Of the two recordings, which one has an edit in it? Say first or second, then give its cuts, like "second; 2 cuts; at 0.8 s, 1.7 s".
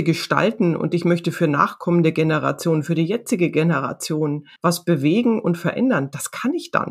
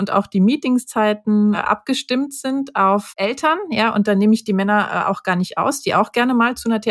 first; 1 cut; at 4.6 s